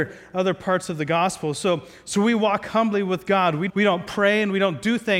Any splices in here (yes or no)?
yes